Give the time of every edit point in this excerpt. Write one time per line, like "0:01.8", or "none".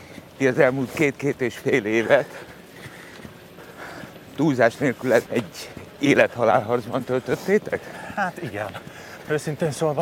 0:05.3